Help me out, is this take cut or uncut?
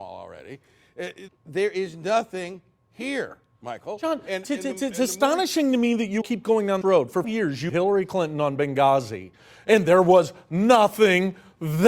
cut